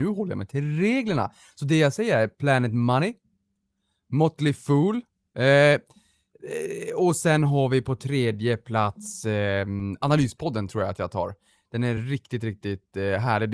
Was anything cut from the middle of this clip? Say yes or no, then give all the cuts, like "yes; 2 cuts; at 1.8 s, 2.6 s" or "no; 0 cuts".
no; 0 cuts